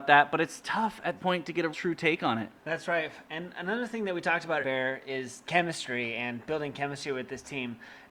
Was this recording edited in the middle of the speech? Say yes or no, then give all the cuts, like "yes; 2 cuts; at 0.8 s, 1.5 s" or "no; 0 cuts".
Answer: yes; 4 cuts; at 1.2 s, 1.7 s, 2.6 s, 4.6 s